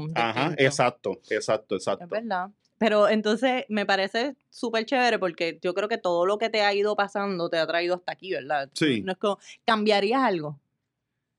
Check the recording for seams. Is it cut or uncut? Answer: uncut